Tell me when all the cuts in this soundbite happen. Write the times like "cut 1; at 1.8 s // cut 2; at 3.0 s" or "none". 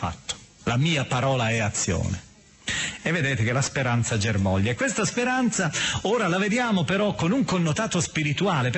none